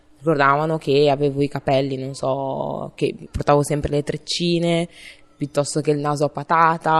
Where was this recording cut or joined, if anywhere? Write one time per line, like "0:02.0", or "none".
none

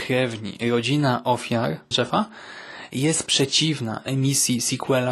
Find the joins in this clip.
0:01.9

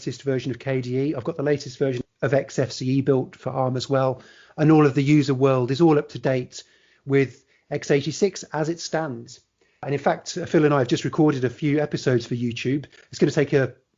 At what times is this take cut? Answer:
none

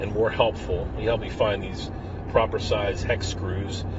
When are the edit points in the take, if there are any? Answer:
none

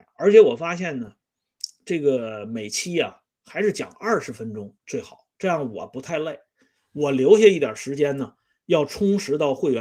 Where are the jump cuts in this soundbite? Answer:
0:04.8

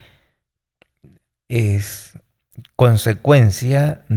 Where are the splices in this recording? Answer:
none

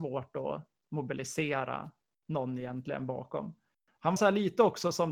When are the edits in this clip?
0:04.2

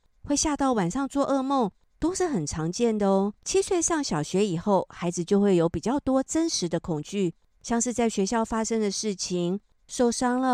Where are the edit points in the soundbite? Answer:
0:03.4

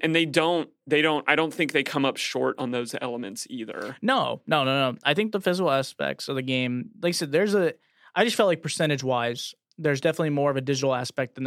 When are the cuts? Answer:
none

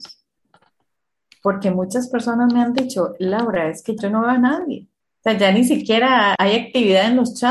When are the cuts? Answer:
0:04.0
0:05.0
0:06.4

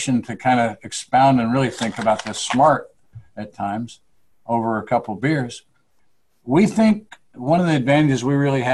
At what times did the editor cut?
none

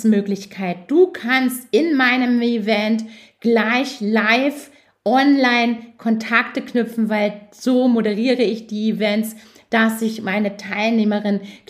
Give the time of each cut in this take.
none

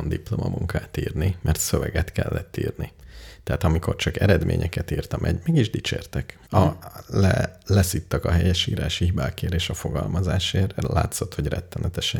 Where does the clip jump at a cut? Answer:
0:06.5

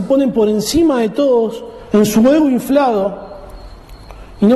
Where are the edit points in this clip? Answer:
none

